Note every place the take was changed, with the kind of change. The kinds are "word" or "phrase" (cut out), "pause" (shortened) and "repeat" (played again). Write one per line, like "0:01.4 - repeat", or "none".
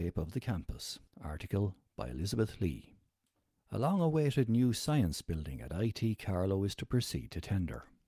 none